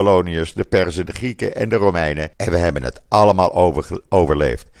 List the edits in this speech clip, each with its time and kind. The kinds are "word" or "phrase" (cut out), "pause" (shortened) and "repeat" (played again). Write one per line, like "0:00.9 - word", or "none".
0:01.1 - phrase
0:02.3 - pause